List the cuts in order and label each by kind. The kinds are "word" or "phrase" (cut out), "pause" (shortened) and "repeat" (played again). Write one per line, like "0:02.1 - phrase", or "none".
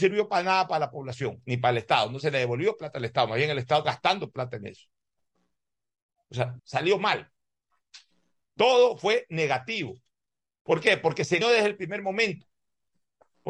0:03.8 - word
0:06.6 - word
0:11.4 - word